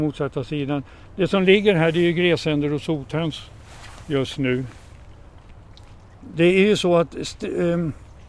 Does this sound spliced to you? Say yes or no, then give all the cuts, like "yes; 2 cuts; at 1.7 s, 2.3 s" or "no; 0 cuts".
no; 0 cuts